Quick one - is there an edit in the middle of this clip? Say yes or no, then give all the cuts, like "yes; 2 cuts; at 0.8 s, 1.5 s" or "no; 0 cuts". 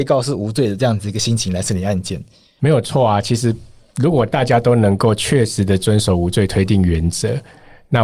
no; 0 cuts